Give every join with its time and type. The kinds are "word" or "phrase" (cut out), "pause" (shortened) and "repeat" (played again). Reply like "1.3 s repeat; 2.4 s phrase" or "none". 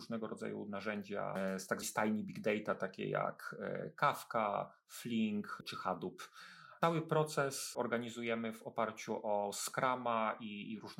1.8 s word